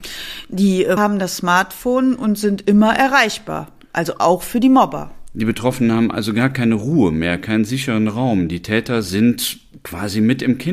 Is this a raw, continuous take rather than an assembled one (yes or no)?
no